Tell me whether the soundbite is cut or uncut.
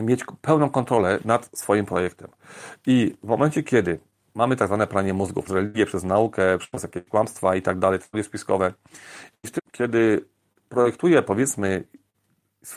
cut